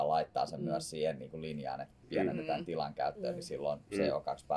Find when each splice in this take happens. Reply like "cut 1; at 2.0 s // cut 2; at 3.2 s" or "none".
none